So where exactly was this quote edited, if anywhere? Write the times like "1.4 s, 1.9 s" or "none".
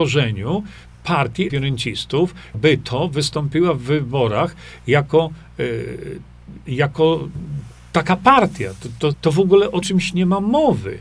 1.5 s, 2.5 s, 9.1 s, 9.8 s